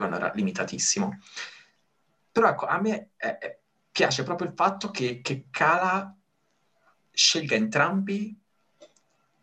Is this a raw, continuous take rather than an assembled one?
yes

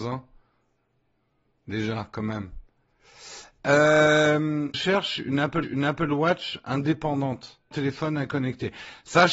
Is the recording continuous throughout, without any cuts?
no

